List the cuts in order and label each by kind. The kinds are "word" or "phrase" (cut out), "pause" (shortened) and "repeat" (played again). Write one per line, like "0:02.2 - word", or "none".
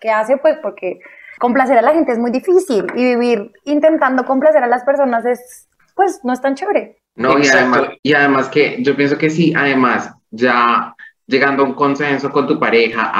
0:01.4 - pause
0:05.8 - pause
0:07.1 - pause
0:08.0 - pause